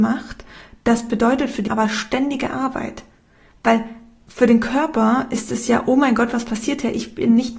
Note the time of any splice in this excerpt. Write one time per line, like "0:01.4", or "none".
0:01.7